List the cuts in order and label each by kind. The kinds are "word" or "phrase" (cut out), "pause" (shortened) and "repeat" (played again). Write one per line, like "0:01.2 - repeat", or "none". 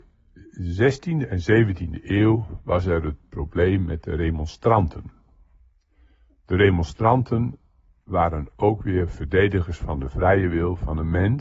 none